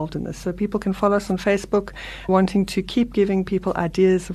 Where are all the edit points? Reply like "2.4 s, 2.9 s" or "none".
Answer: 2.3 s